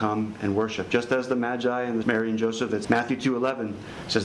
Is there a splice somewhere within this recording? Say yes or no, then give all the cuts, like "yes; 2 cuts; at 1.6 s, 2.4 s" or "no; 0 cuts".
yes; 2 cuts; at 2.0 s, 2.8 s